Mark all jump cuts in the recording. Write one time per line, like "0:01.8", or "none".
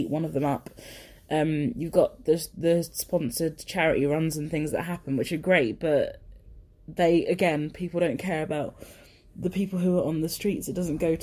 none